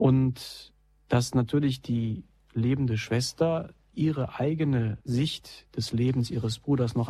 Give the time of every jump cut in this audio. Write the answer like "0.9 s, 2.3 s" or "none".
5.0 s